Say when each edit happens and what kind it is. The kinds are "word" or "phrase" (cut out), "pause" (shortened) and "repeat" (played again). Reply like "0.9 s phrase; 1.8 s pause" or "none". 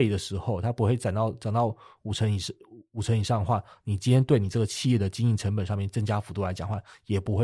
none